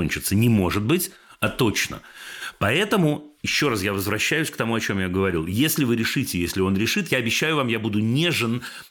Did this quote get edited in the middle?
no; 0 cuts

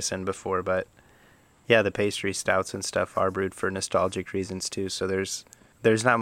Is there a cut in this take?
no; 0 cuts

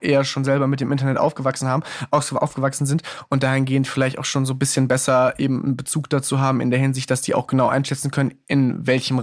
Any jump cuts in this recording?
no; 0 cuts

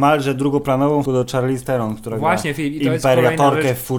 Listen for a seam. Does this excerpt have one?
yes; 1 cut; at 1.1 s

